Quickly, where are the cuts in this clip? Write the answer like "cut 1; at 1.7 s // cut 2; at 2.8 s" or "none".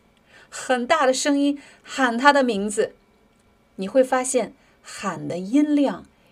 none